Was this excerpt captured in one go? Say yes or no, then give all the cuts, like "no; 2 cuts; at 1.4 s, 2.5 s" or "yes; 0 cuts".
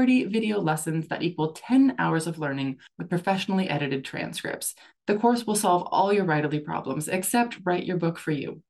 yes; 0 cuts